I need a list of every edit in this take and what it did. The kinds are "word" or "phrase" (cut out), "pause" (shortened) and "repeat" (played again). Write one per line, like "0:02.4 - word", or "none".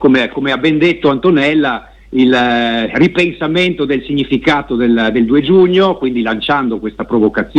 0:02.9 - word